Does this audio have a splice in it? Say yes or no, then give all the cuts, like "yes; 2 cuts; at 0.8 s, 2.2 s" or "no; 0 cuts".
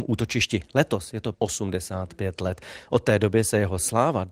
yes; 1 cut; at 1.3 s